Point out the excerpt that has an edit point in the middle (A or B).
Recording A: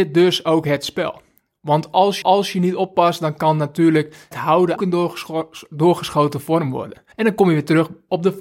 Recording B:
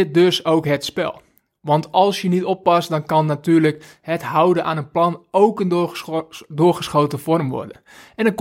A